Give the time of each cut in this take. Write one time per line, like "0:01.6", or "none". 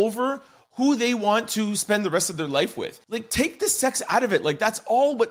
0:03.0